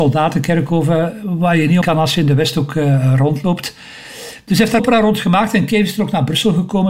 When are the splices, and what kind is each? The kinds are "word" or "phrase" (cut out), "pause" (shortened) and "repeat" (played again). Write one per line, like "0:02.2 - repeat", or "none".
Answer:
0:01.8 - word
0:04.8 - phrase